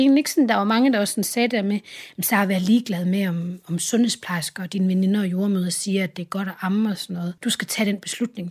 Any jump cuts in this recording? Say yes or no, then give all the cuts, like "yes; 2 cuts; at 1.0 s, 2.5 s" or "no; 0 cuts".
yes; 1 cut; at 7.4 s